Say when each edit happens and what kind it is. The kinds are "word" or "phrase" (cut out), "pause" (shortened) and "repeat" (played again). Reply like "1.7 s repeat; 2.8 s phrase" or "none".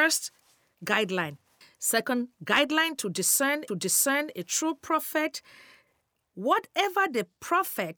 1.6 s pause; 3.7 s repeat